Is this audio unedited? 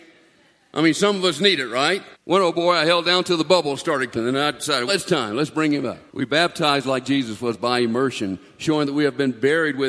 no; 4 cuts; at 2.1 s, 4.1 s, 4.9 s, 6.1 s

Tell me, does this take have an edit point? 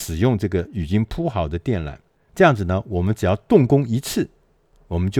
no; 0 cuts

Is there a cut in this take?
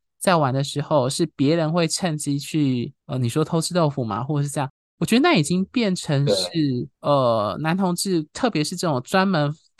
yes; 2 cuts; at 3.0 s, 6.9 s

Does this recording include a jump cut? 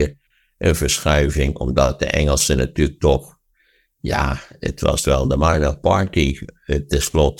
no; 0 cuts

